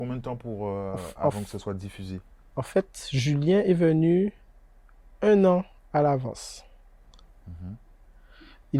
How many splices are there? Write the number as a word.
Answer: zero